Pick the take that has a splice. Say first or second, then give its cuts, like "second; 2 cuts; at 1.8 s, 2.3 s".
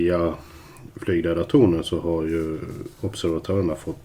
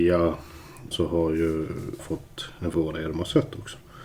second; 3 cuts; at 0.9 s, 2.0 s, 2.7 s